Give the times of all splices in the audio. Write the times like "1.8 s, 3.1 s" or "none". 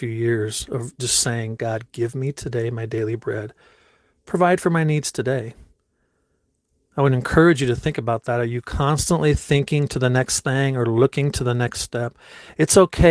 none